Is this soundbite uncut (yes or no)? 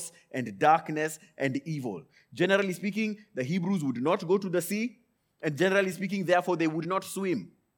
yes